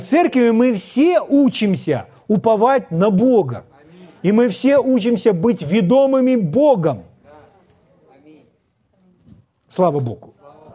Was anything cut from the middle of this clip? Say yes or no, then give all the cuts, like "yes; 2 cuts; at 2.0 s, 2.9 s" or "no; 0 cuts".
no; 0 cuts